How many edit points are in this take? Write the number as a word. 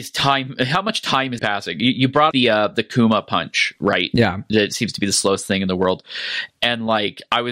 two